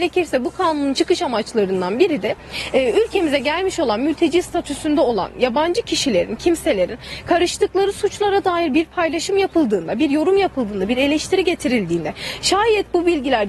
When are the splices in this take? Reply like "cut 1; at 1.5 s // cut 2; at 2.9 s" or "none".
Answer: none